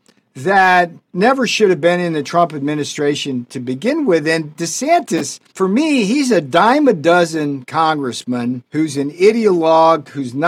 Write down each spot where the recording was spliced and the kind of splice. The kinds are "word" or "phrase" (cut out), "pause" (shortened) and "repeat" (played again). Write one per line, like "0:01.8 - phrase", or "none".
0:01.0 - pause
0:05.5 - pause
0:08.7 - pause